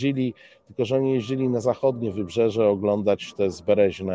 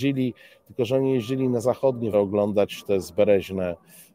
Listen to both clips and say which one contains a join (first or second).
second